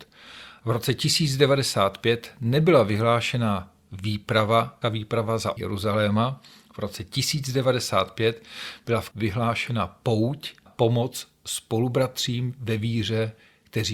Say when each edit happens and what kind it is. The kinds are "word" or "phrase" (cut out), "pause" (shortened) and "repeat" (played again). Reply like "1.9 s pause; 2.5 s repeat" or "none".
4.8 s word; 5.6 s word; 9.1 s word; 10.7 s word